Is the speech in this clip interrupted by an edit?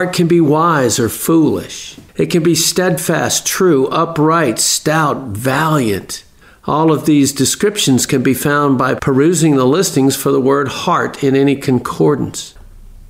yes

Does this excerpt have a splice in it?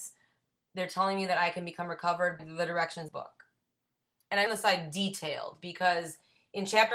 yes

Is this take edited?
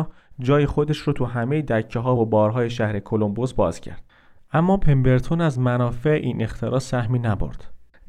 no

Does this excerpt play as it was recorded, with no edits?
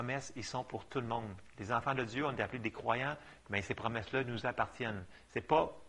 yes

